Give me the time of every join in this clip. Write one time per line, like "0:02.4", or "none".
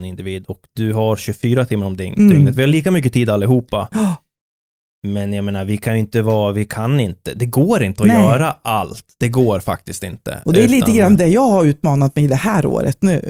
none